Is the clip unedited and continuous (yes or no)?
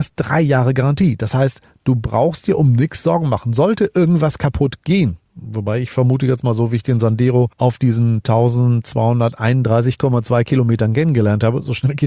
yes